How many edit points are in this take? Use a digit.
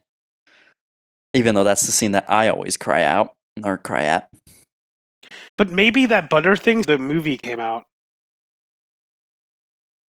2